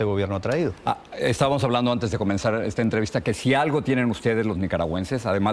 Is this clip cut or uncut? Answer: uncut